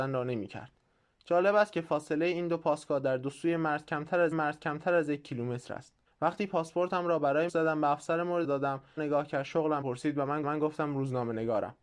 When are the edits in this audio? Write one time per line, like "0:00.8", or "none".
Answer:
0:04.3
0:06.1
0:07.5
0:08.4
0:09.0
0:09.8
0:10.4